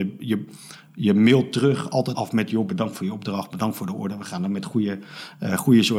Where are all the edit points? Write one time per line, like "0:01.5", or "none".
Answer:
0:02.1